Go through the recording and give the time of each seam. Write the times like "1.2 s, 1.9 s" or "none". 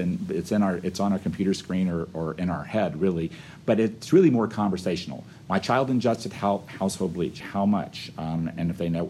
7.4 s